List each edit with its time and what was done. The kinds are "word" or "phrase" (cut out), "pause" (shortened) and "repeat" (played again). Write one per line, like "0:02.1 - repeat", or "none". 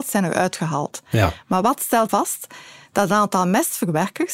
0:02.1 - word